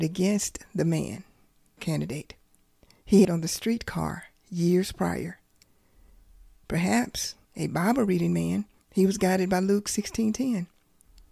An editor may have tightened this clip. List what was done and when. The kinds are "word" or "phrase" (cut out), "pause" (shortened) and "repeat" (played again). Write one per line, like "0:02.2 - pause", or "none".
0:01.8 - word
0:03.2 - phrase
0:07.4 - pause
0:08.8 - pause

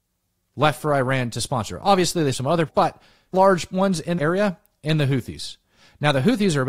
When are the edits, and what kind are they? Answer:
0:02.3 - word
0:02.7 - word
0:03.3 - word
0:04.2 - word
0:04.7 - word

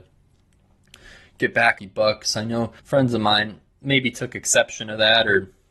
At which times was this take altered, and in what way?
0:01.8 - phrase
0:02.8 - pause

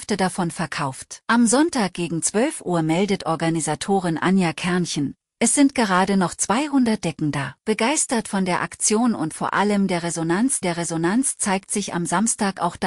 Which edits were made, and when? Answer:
0:01.2 - pause
0:07.6 - pause
0:10.6 - repeat

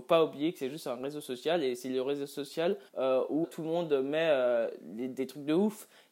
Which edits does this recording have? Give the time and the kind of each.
0:02.9 - pause
0:03.4 - word

